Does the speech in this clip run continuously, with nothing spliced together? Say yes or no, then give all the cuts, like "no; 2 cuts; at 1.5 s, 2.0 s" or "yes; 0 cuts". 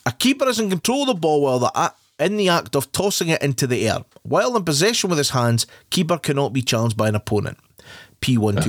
yes; 0 cuts